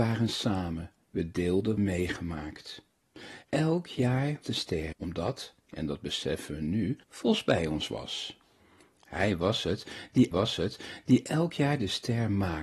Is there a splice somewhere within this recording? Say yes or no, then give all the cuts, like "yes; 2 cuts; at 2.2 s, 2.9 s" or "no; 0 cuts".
yes; 7 cuts; at 1.8 s, 3.4 s, 4.4 s, 4.9 s, 5.6 s, 7.0 s, 10.3 s